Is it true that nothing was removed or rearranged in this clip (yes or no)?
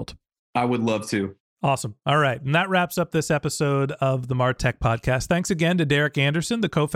yes